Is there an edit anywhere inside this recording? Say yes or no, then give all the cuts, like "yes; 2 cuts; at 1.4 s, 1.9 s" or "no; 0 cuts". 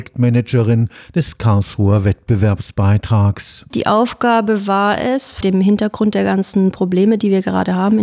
yes; 1 cut; at 5.4 s